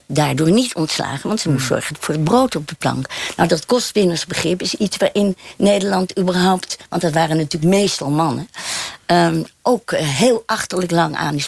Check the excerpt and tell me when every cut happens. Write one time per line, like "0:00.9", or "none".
none